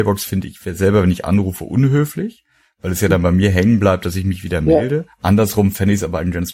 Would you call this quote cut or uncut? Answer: cut